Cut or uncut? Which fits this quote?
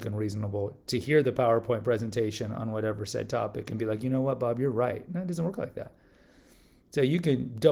uncut